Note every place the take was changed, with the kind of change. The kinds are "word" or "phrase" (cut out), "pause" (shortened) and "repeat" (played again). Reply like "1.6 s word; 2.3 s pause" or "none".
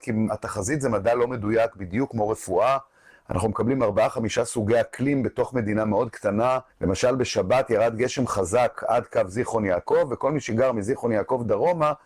6.7 s pause